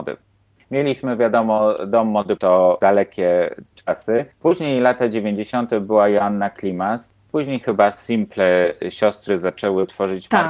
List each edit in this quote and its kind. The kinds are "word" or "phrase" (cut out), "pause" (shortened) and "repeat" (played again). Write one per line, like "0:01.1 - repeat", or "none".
0:02.4 - word
0:04.3 - pause
0:07.2 - pause